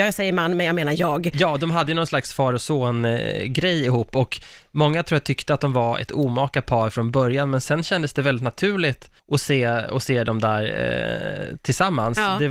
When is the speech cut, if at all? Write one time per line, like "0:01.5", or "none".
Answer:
0:09.2